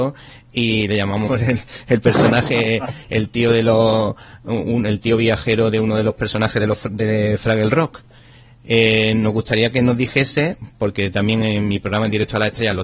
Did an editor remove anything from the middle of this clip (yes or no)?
yes